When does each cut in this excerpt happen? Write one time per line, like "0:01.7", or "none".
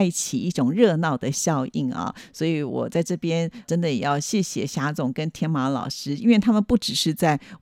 0:03.6